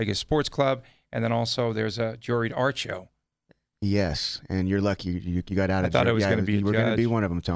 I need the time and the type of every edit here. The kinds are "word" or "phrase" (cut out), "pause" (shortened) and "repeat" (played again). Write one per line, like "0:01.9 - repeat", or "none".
none